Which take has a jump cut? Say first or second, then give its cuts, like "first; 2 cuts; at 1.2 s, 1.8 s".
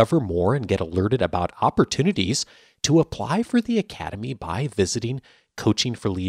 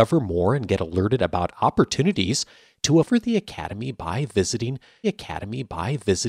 second; 2 cuts; at 3.0 s, 5.0 s